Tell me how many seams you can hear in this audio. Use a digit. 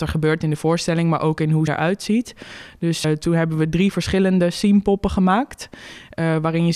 2